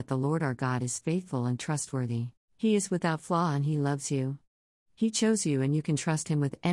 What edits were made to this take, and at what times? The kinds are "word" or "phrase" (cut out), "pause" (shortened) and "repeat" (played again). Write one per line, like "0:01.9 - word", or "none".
0:02.4 - pause